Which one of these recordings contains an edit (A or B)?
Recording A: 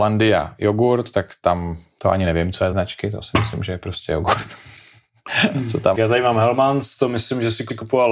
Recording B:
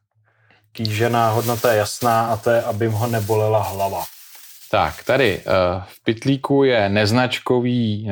A